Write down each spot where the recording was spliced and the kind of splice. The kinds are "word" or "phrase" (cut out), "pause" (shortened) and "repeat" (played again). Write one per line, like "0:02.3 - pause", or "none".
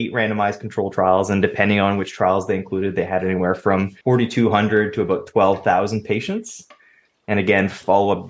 0:04.0 - pause